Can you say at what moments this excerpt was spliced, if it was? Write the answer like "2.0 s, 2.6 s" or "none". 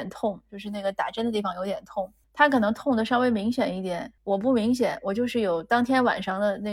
2.2 s, 4.2 s